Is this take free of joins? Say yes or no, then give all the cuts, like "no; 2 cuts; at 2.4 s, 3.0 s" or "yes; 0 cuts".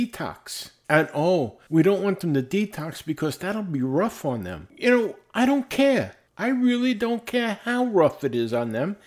yes; 0 cuts